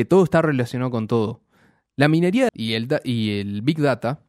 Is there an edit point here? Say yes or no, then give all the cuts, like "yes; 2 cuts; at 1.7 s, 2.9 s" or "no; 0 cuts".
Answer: yes; 1 cut; at 2.5 s